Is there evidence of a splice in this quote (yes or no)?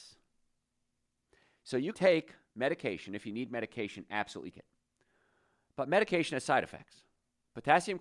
yes